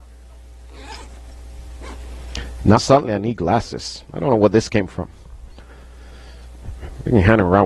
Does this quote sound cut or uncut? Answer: cut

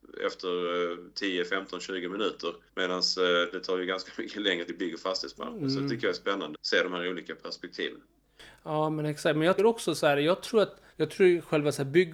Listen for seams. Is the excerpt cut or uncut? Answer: cut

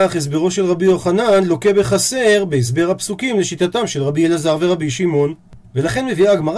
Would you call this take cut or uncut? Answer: uncut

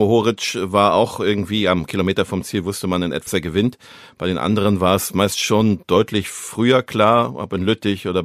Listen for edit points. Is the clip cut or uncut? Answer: cut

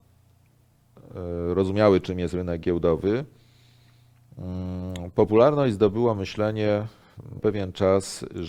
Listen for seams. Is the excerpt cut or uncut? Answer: cut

